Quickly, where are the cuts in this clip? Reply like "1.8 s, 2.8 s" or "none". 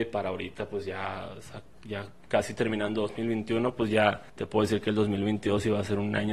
4.3 s